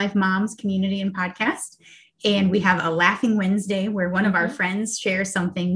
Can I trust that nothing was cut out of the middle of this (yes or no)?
yes